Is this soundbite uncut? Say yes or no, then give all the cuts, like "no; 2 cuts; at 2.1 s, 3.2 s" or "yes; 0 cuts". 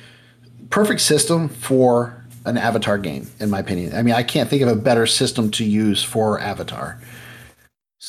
no; 1 cut; at 2.5 s